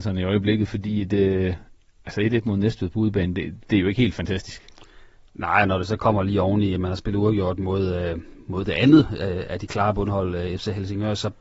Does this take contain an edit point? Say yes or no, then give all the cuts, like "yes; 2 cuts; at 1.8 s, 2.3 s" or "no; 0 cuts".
no; 0 cuts